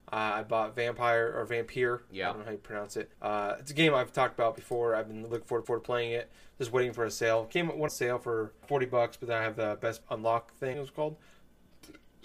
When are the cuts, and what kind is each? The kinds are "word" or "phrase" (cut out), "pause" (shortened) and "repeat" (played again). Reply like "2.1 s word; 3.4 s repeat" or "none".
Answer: 3.1 s pause; 5.3 s word; 5.6 s repeat; 7.9 s word; 8.6 s word; 10.0 s word; 10.7 s phrase